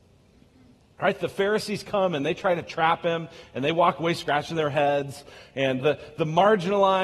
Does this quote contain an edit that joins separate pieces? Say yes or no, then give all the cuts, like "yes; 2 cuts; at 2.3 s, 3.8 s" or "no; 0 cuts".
yes; 1 cut; at 5.8 s